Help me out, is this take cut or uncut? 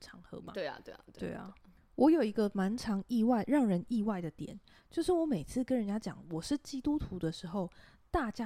uncut